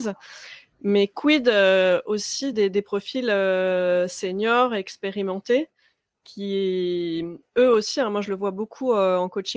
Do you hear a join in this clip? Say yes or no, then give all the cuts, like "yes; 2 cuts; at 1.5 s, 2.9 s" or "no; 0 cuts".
no; 0 cuts